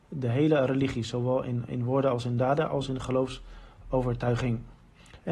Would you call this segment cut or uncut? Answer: uncut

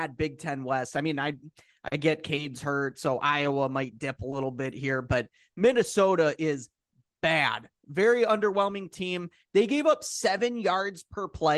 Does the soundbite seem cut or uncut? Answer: uncut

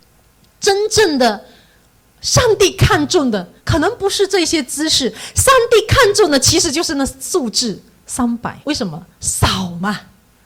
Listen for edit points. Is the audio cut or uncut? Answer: cut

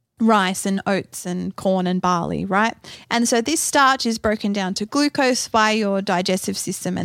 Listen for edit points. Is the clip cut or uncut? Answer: uncut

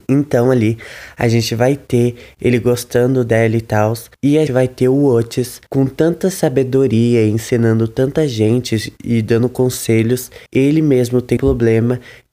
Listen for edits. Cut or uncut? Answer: cut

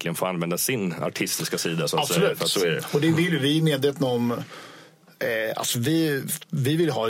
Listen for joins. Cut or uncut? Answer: uncut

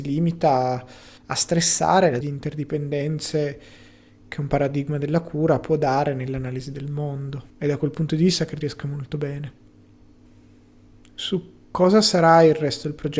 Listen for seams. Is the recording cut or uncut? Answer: cut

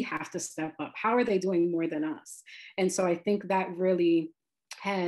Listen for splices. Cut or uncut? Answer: uncut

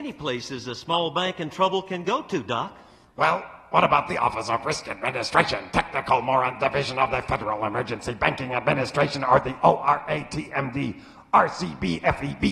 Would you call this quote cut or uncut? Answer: uncut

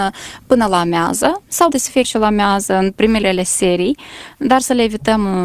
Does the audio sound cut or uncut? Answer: cut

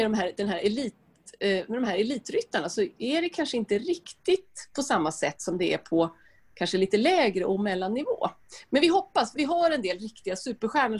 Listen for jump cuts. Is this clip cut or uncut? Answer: cut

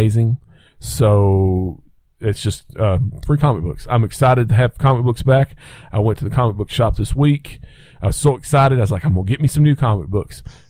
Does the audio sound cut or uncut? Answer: uncut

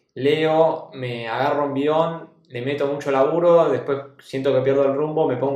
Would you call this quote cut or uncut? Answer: uncut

